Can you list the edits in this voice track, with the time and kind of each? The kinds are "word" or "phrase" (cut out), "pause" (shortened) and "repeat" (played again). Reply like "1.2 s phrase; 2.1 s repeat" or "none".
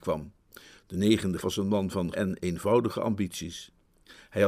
1.4 s word; 2.1 s word